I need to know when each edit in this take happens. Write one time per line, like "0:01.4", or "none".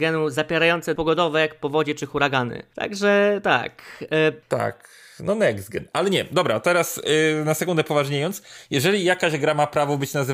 0:01.0